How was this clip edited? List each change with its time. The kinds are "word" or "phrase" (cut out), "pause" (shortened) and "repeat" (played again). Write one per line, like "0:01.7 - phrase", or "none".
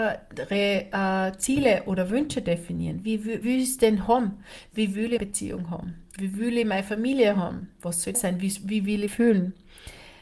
0:03.4 - word
0:05.2 - word
0:08.1 - word
0:09.1 - word